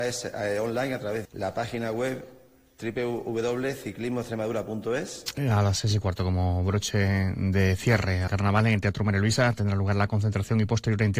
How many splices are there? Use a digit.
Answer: 2